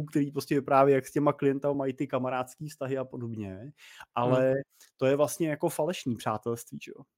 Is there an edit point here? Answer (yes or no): no